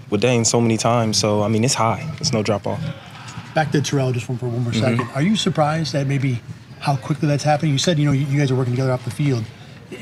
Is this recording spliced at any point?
no; 0 cuts

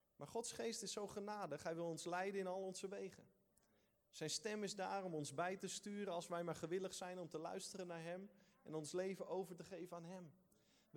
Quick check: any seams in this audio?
no; 0 cuts

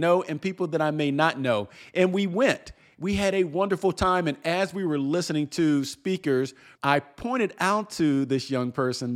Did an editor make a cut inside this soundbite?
no; 0 cuts

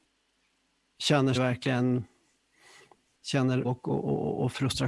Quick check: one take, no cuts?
no; 2 cuts; at 1.3 s, 3.6 s

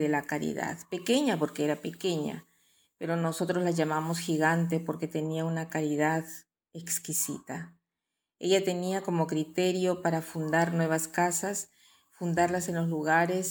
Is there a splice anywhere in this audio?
no; 0 cuts

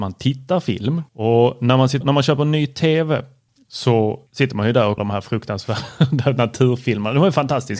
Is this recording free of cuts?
no; 4 cuts; at 1.1 s, 2.0 s, 4.3 s, 5.0 s

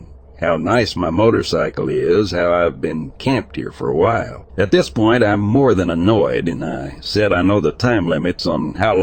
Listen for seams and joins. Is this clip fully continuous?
no; 1 cut; at 4.5 s

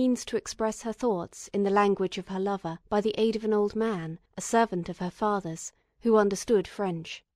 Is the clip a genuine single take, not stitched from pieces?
no; 2 cuts; at 2.8 s, 4.3 s

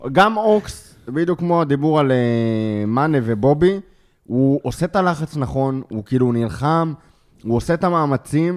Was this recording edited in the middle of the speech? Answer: no; 0 cuts

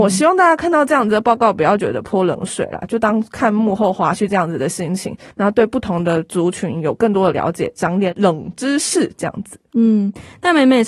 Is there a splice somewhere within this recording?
yes; 1 cut; at 5.3 s

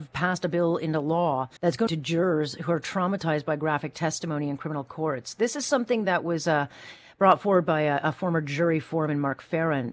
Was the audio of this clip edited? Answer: yes; 2 cuts; at 1.6 s, 1.9 s

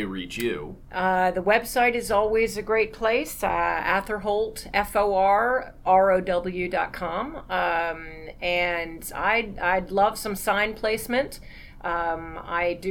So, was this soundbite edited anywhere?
no; 0 cuts

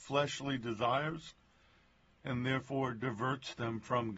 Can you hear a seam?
no; 0 cuts

